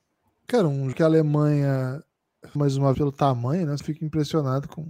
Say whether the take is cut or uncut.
cut